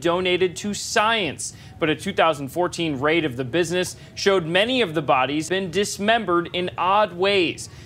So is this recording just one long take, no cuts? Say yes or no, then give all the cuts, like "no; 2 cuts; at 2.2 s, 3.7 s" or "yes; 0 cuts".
no; 1 cut; at 5.5 s